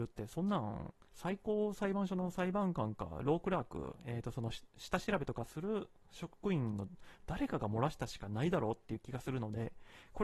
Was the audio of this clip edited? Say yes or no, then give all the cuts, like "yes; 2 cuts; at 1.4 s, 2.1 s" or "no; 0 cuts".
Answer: yes; 1 cut; at 1.1 s